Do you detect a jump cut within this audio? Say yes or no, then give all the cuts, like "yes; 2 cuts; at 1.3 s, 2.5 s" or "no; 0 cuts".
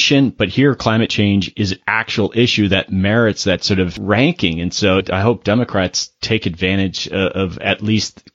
no; 0 cuts